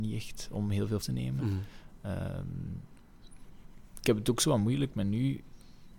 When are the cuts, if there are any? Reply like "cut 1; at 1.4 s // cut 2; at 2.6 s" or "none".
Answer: cut 1; at 1.0 s